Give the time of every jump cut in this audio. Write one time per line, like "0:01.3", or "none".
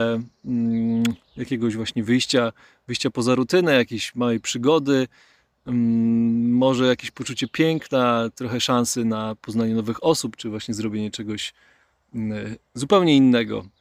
none